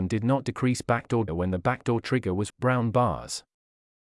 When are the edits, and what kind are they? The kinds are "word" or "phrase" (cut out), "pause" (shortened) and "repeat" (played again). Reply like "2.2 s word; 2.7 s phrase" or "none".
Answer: 1.3 s word; 2.5 s word